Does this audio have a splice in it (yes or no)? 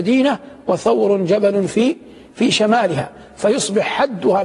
no